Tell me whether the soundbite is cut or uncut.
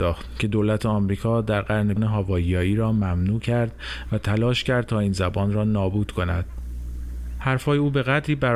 cut